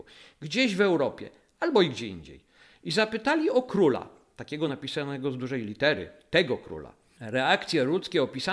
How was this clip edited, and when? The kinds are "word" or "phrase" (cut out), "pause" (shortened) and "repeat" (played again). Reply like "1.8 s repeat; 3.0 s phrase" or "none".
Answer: none